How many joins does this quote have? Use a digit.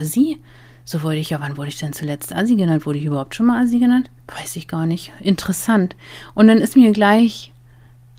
1